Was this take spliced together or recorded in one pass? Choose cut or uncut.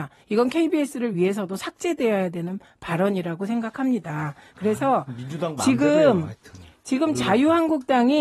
uncut